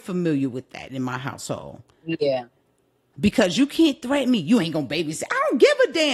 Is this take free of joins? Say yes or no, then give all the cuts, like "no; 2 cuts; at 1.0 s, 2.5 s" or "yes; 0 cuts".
yes; 0 cuts